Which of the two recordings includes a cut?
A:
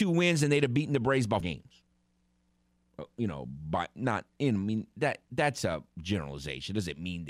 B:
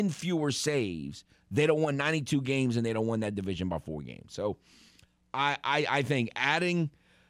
A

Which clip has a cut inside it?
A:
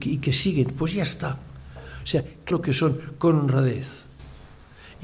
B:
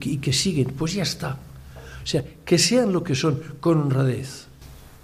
A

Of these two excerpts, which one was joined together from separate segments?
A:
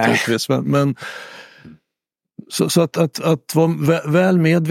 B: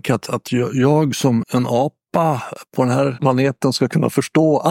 B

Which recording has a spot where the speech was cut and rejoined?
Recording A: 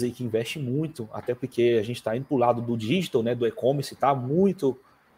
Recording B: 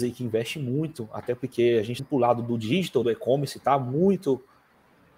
B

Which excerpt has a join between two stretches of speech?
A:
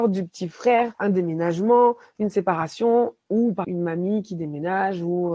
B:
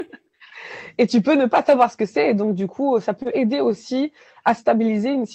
A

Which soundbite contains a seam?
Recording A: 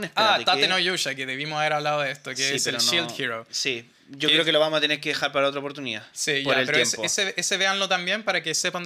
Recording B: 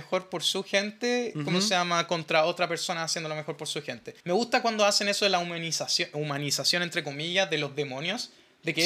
B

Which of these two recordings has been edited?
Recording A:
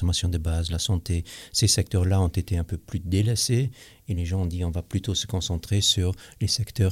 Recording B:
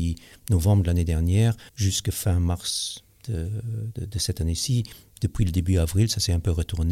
B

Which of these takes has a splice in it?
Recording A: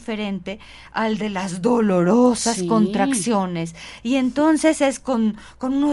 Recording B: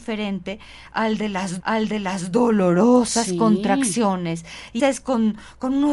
B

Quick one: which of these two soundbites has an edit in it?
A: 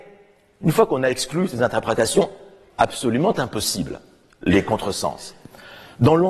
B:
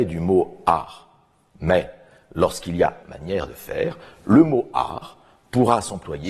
B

